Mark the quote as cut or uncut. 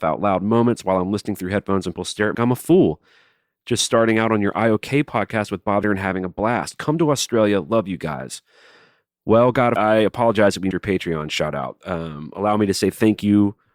cut